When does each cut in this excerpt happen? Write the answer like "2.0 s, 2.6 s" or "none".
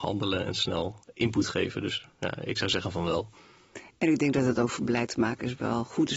none